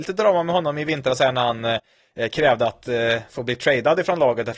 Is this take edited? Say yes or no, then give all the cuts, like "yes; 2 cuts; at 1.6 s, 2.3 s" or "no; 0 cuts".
no; 0 cuts